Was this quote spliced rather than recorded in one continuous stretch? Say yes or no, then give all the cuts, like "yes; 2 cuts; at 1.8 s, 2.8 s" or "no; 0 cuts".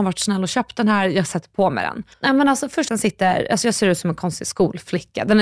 yes; 2 cuts; at 2.1 s, 2.9 s